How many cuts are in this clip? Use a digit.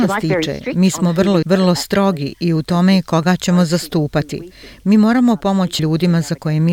2